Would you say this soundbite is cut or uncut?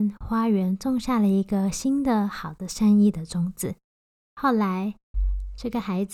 uncut